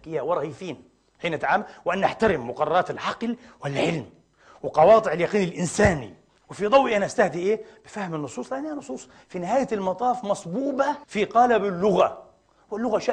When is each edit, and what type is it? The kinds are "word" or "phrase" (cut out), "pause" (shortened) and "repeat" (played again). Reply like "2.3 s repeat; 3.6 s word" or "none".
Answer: 11.0 s pause